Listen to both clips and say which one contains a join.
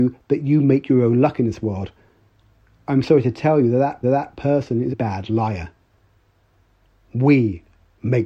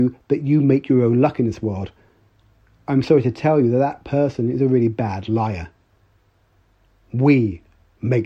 first; 2 cuts; at 4.0 s, 4.9 s

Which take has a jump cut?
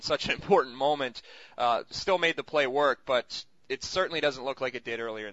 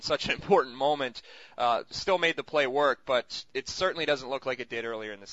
second; 1 cut; at 3.5 s

